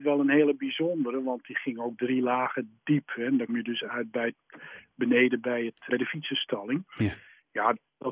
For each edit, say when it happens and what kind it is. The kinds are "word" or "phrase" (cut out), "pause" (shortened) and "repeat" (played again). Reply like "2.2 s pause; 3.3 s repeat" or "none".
3.5 s word; 5.9 s word

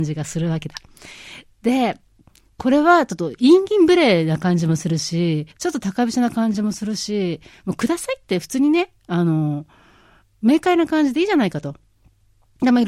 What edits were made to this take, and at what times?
5.5 s pause

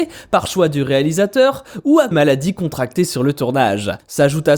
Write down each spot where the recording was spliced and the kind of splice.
2.1 s phrase

